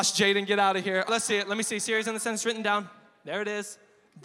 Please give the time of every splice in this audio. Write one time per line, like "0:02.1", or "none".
0:01.1